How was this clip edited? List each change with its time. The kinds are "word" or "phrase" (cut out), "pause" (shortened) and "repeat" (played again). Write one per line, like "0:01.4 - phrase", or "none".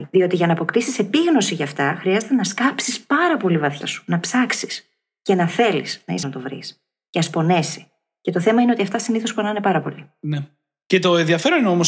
0:03.8 - word
0:06.2 - word